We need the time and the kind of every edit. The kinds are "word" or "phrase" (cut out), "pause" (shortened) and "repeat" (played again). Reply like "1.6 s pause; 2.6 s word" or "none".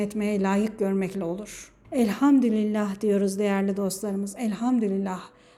1.8 s pause

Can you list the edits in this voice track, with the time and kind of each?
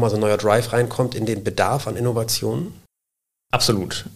none

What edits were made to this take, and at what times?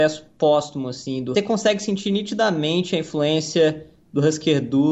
1.3 s phrase

